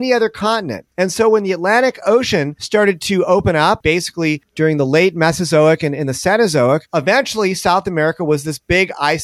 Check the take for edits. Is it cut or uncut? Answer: cut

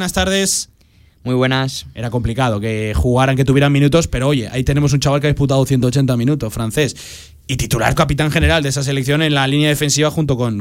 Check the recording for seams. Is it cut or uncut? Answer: cut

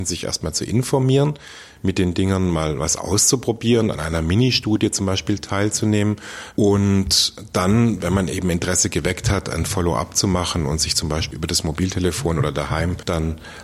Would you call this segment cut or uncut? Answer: uncut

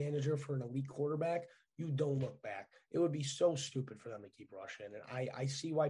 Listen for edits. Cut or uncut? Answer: uncut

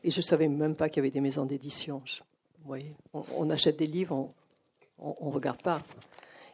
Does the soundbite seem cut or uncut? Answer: uncut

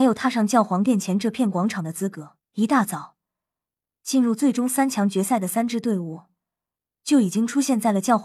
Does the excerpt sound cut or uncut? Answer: cut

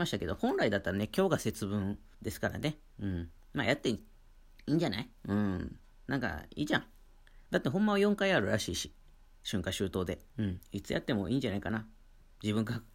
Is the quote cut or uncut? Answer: cut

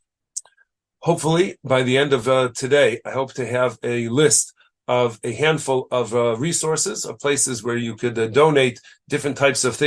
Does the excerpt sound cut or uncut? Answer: uncut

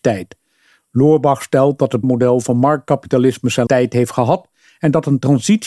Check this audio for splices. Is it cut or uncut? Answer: cut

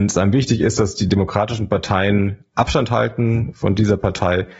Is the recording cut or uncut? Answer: uncut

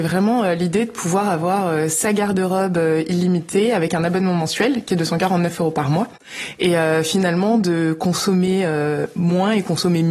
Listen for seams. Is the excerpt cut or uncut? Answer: uncut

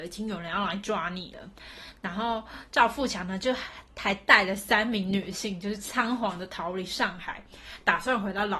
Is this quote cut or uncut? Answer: uncut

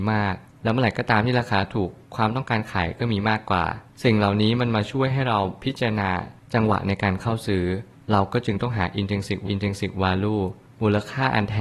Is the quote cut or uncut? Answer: cut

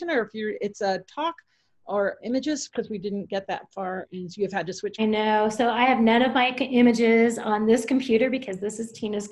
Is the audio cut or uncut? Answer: cut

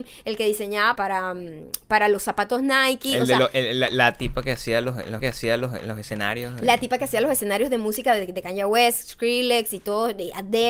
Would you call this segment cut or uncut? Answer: cut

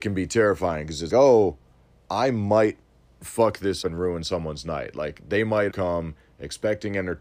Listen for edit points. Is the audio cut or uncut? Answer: cut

